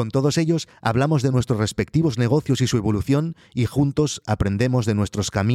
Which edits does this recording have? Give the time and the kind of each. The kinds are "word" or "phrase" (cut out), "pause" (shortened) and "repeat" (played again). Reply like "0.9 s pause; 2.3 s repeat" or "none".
none